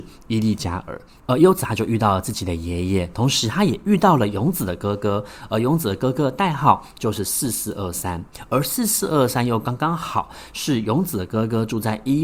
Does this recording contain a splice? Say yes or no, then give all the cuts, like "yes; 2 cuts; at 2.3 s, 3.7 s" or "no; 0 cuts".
no; 0 cuts